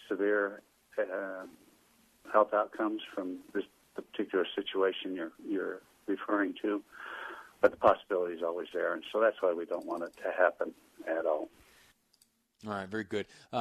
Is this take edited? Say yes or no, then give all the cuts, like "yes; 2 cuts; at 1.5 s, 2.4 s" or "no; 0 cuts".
no; 0 cuts